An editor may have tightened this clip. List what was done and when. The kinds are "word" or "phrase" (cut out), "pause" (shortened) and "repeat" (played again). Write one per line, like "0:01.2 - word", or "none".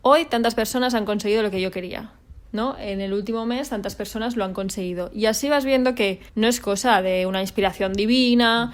0:02.5 - pause
0:06.3 - pause